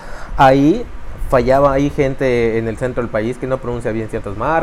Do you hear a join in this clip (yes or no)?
no